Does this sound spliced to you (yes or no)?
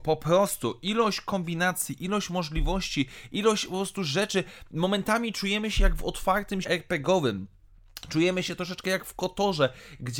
yes